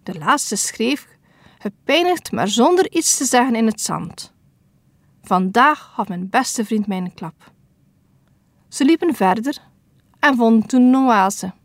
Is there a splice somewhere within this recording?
no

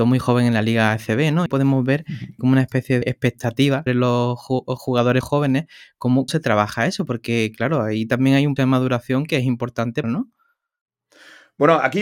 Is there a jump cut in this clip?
yes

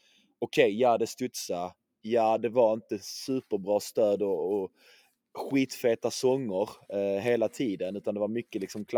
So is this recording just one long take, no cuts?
yes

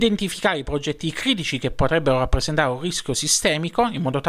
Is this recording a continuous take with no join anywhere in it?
yes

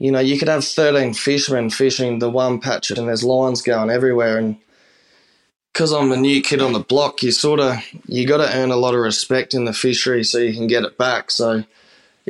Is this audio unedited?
no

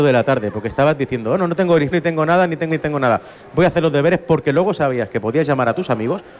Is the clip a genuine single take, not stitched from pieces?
no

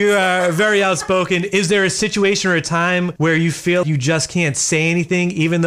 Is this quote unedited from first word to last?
no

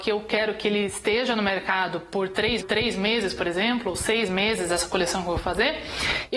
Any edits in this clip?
yes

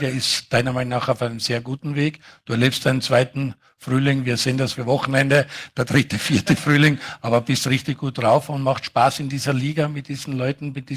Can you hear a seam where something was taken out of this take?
yes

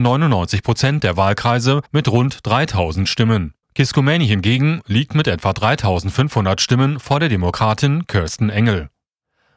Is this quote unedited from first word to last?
no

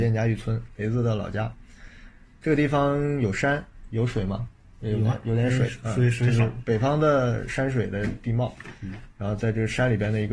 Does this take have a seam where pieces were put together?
no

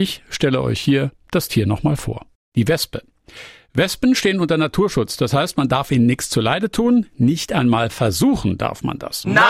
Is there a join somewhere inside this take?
no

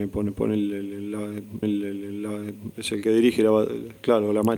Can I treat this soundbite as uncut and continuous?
no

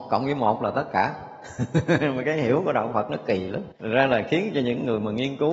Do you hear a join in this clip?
yes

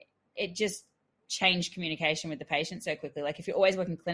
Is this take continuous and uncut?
yes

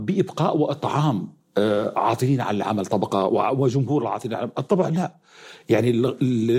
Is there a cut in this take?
no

